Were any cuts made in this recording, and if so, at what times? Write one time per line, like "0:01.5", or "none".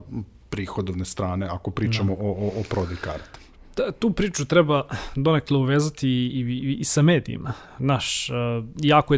none